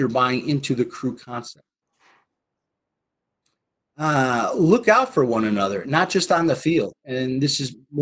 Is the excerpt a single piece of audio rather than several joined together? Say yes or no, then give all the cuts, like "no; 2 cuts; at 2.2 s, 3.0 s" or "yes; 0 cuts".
yes; 0 cuts